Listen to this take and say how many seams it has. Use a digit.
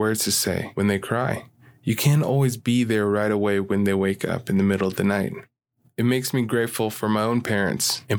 0